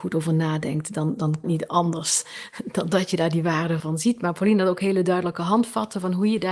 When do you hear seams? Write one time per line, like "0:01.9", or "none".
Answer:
0:01.4
0:03.8